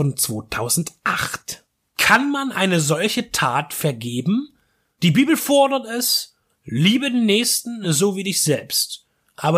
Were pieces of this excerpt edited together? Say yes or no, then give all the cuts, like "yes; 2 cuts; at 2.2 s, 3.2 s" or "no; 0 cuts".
no; 0 cuts